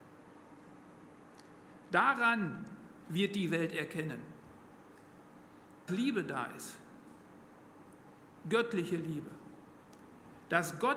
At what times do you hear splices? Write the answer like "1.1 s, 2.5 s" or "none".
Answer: 5.9 s